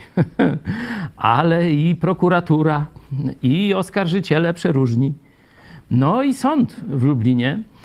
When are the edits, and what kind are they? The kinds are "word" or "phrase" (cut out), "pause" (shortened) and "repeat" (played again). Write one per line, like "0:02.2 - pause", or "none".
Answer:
none